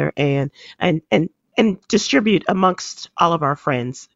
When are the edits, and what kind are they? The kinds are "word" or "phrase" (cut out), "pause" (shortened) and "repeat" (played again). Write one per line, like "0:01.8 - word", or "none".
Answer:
0:01.8 - pause

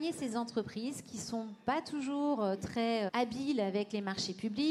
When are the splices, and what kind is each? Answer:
0:03.1 - word

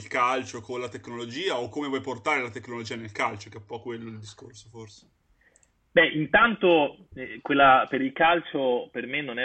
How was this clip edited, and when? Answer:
none

